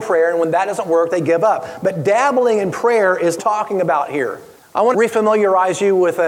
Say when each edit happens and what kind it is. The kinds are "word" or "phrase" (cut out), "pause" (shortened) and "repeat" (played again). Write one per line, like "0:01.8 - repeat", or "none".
0:03.4 - phrase
0:04.5 - pause
0:04.9 - word